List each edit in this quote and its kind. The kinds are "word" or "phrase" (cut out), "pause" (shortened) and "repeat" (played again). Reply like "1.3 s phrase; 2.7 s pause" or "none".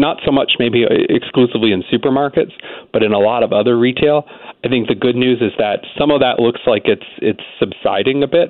none